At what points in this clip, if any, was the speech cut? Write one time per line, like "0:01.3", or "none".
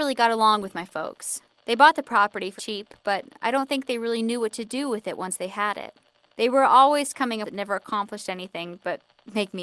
0:01.5
0:02.6
0:06.2
0:07.4